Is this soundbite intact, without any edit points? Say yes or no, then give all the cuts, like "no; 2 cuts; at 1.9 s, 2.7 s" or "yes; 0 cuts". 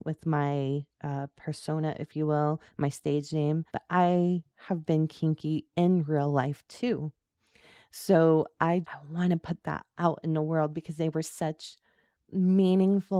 no; 3 cuts; at 0.9 s, 3.7 s, 8.8 s